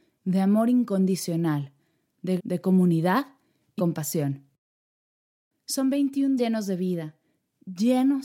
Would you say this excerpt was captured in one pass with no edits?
no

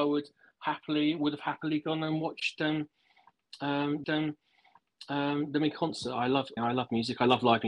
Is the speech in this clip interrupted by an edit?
yes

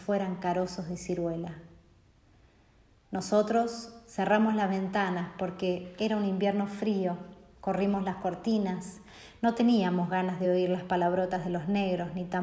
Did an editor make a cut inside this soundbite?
no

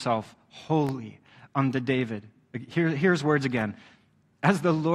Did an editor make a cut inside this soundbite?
no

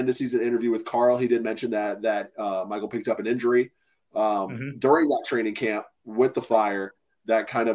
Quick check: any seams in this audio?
no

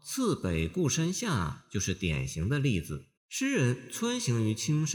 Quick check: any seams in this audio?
yes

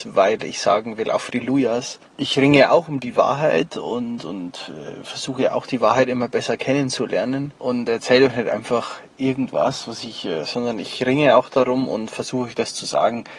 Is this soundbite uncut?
no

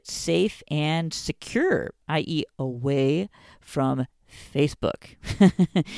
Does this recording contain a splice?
no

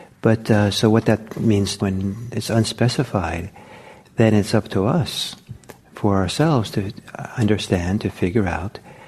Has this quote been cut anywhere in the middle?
yes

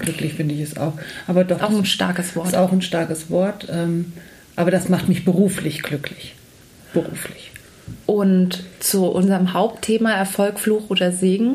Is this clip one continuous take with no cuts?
yes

